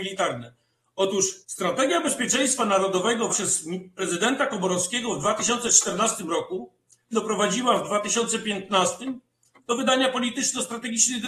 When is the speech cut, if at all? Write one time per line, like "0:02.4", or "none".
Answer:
0:01.4
0:03.3
0:07.1

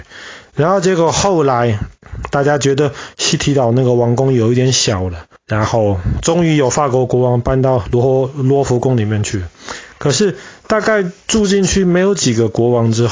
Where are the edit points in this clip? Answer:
0:05.4

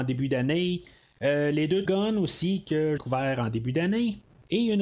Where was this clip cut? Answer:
0:01.9
0:03.0

